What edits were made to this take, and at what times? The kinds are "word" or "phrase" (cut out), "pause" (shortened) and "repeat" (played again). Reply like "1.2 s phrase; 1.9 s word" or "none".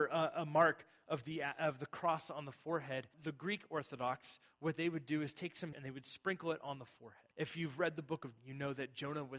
3.1 s word; 5.7 s phrase; 7.3 s pause; 8.4 s word